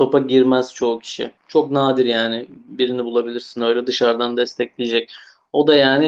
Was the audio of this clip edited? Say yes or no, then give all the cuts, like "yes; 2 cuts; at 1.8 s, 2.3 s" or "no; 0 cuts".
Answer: yes; 1 cut; at 1.4 s